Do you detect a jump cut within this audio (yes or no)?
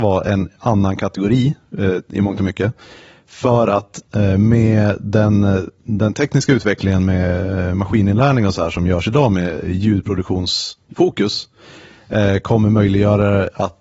no